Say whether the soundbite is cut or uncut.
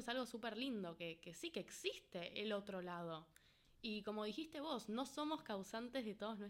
uncut